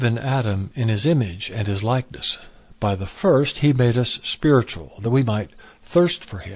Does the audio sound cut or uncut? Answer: uncut